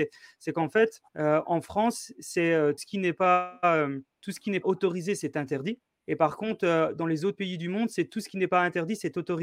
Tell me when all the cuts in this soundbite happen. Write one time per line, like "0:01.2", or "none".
0:01.1
0:02.8
0:04.1
0:04.6
0:05.9